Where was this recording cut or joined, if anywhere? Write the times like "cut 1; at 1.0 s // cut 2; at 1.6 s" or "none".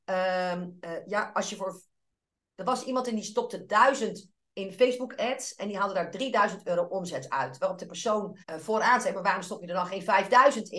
cut 1; at 8.4 s